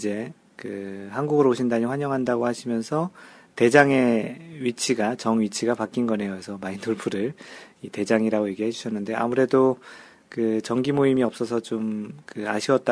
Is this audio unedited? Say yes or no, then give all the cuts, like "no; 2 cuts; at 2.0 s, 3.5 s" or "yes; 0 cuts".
yes; 0 cuts